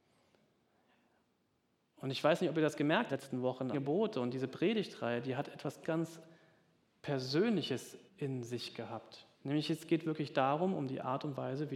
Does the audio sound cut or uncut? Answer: cut